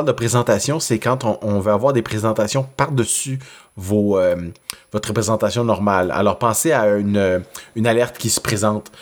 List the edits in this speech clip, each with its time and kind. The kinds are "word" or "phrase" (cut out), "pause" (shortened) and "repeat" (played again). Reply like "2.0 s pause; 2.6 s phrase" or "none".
none